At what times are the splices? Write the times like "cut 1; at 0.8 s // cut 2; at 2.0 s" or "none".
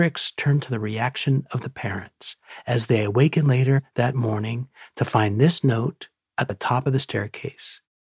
none